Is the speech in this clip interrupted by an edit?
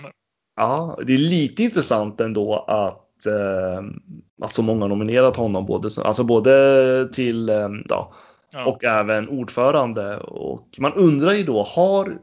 yes; 2 cuts; at 4.3 s, 7.9 s

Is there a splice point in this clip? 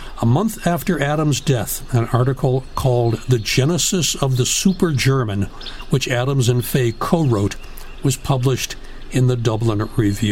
no; 0 cuts

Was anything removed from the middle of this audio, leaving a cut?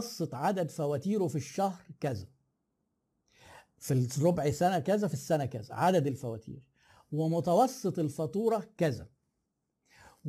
no; 0 cuts

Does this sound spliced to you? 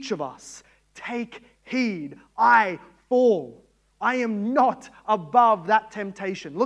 yes; 1 cut; at 2.3 s

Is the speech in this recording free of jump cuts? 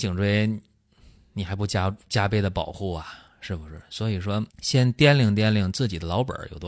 no; 1 cut; at 4.5 s

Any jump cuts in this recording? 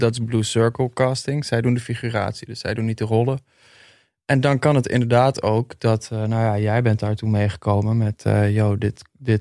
no; 0 cuts

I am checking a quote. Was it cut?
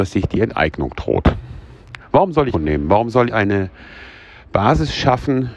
yes; 2 cuts; at 2.5 s, 3.3 s

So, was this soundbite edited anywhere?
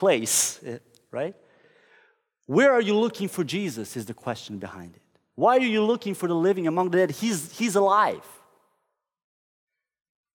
no; 0 cuts

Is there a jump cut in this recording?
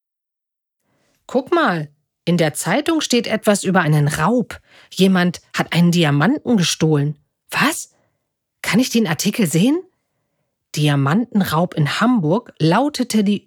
no; 0 cuts

